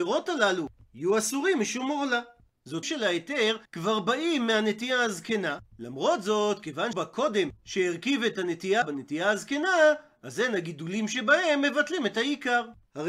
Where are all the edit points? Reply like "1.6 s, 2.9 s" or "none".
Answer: 2.8 s, 3.7 s, 6.9 s, 8.8 s